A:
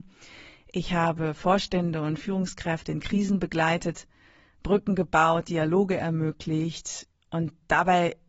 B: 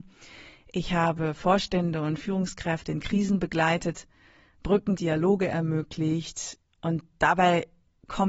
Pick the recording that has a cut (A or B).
B